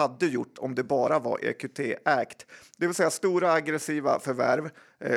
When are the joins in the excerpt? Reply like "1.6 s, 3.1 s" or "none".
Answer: none